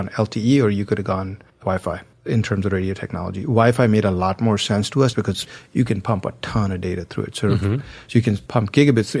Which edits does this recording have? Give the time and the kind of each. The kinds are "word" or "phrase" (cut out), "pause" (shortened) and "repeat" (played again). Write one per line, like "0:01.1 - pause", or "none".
0:01.5 - pause
0:05.1 - word